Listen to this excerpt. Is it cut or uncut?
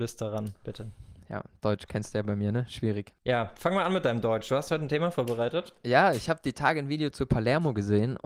cut